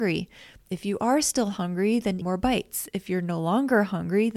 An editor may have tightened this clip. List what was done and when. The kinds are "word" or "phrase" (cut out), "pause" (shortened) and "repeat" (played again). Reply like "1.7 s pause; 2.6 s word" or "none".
2.2 s phrase